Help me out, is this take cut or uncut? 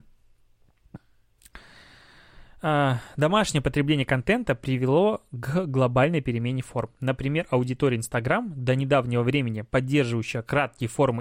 uncut